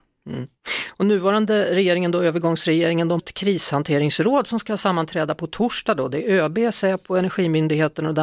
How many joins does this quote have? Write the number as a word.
one